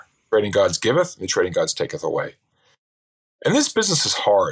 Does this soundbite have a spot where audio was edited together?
no; 0 cuts

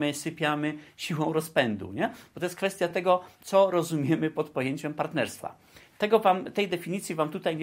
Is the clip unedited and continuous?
yes; 0 cuts

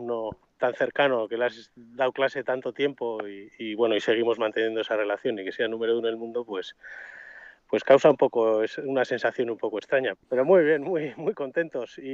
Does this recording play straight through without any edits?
no; 1 cut; at 10.1 s

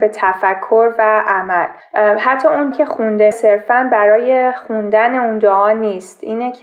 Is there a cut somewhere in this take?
yes; 3 cuts; at 1.8 s, 2.7 s, 3.3 s

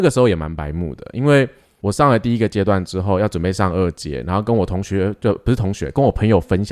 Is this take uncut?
yes; 0 cuts

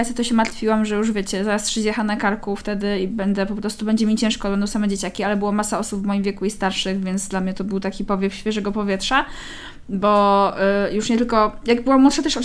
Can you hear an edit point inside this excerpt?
no; 0 cuts

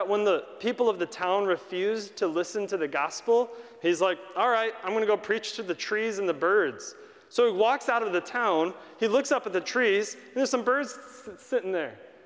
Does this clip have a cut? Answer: no; 0 cuts

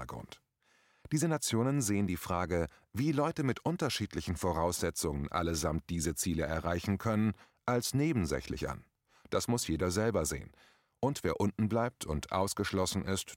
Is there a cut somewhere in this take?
no; 0 cuts

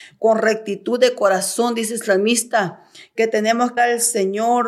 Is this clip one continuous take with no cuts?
no; 1 cut; at 3.8 s

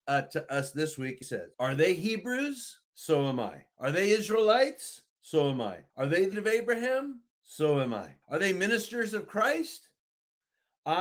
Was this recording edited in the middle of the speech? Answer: yes; 9 cuts; at 1.2 s, 1.5 s, 2.8 s, 3.7 s, 5.1 s, 5.9 s, 6.3 s, 7.3 s, 8.2 s

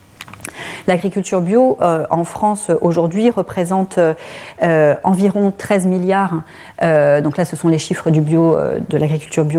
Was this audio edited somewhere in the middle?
no; 0 cuts

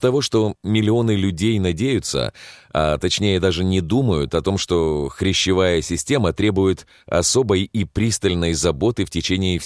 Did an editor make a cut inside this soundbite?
no; 0 cuts

